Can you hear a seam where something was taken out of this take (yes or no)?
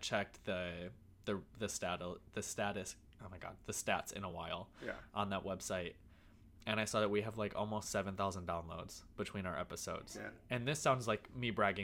no